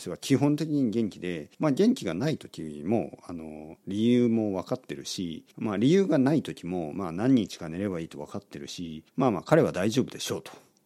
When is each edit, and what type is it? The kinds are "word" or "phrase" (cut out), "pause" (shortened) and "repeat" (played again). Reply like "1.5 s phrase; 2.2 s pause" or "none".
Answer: 1.5 s pause; 5.5 s pause; 9.1 s pause